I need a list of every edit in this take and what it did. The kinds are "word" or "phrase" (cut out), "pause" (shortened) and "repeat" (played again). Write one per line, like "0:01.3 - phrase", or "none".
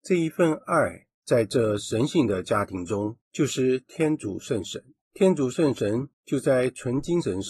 0:01.1 - pause
0:03.2 - pause
0:05.0 - pause
0:06.1 - pause